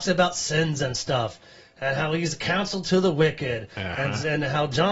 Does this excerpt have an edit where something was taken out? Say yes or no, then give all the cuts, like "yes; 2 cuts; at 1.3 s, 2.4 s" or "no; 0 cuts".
no; 0 cuts